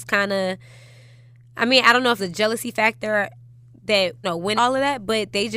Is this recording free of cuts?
no; 3 cuts; at 2.2 s, 4.2 s, 4.6 s

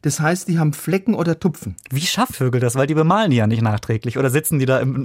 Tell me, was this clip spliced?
yes; 1 cut; at 2.3 s

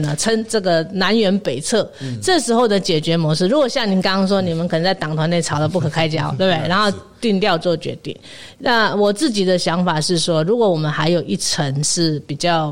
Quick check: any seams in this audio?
no; 0 cuts

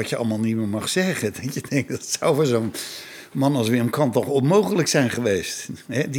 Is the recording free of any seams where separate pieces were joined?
yes; 0 cuts

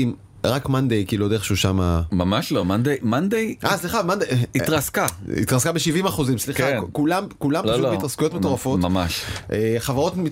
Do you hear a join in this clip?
no; 0 cuts

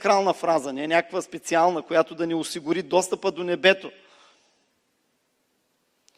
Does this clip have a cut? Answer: no; 0 cuts

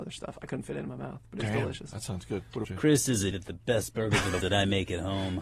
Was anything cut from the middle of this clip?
yes; 3 cuts; at 2.6 s, 3.3 s, 4.4 s

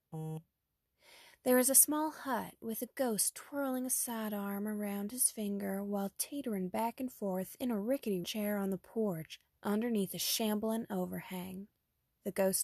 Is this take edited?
yes; 1 cut; at 8.2 s

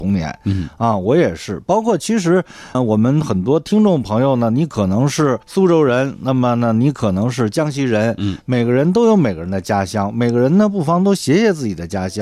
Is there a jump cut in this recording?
yes; 2 cuts; at 2.7 s, 5.4 s

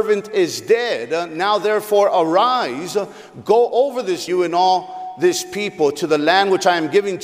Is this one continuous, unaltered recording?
no; 1 cut; at 4.3 s

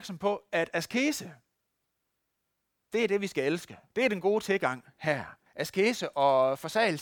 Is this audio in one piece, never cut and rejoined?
no; 2 cuts; at 3.9 s, 5.5 s

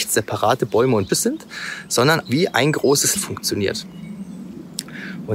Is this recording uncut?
no; 3 cuts; at 1.1 s, 2.3 s, 3.2 s

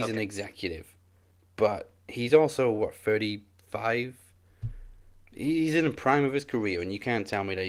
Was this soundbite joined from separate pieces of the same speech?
no; 0 cuts

